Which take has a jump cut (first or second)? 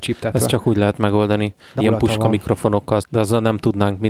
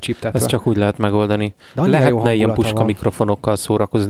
first